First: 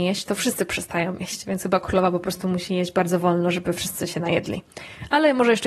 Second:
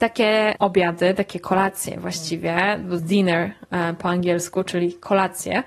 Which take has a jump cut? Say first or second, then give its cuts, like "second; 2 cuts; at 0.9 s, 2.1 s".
second; 1 cut; at 3.0 s